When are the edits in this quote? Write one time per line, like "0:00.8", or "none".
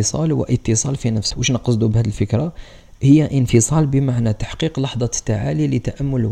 0:01.3